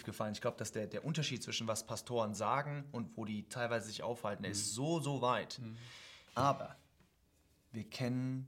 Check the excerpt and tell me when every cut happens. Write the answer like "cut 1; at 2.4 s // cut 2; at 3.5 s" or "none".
cut 1; at 6.3 s